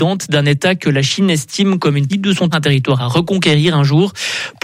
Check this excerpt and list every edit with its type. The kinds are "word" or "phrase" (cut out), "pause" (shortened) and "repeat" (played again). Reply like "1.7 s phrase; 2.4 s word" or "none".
2.1 s word; 2.5 s word